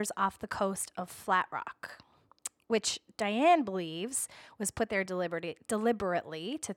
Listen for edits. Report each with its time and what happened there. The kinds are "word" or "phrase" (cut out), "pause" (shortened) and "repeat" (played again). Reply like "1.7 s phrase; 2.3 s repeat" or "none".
none